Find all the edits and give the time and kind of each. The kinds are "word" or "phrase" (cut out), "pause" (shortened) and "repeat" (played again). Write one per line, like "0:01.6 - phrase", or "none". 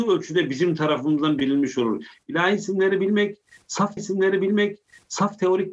0:04.0 - repeat